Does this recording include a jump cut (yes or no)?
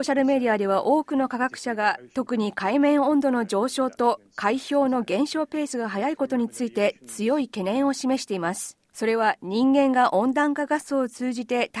yes